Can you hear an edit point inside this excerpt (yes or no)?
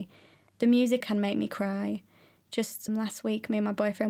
yes